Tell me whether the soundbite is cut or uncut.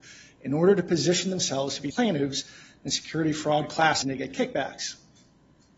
cut